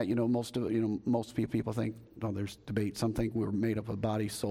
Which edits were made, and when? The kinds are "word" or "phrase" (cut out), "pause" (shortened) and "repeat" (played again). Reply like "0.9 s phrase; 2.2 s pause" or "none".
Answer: 1.5 s repeat

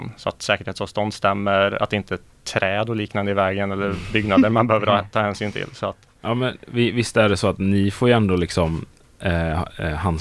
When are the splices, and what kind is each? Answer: none

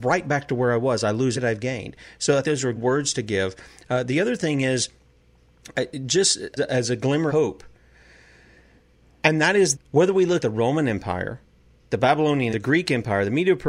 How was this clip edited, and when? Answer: 1.3 s word; 2.4 s word; 2.7 s word; 5.7 s word; 6.6 s word; 7.3 s word; 9.7 s word; 10.4 s word; 12.5 s word

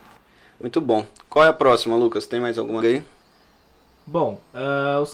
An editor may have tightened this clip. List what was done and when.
2.8 s phrase

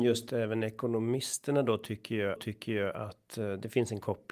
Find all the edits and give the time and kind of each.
2.4 s repeat

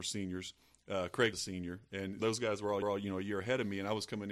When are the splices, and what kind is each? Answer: 1.3 s phrase; 2.2 s word; 2.8 s repeat

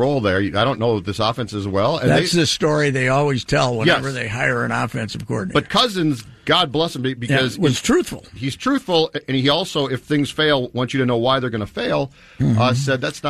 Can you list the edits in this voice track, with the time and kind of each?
none

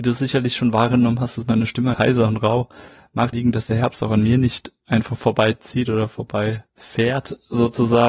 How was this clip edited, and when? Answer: 1.9 s phrase; 3.3 s word; 4.8 s pause; 6.7 s pause

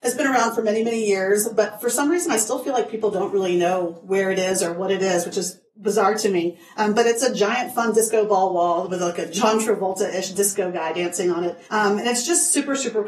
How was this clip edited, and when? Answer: 11.7 s pause

